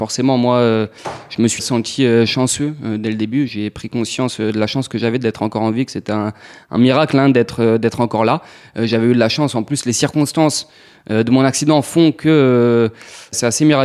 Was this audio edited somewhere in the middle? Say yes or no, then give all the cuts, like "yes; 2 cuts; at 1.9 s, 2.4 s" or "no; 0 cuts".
no; 0 cuts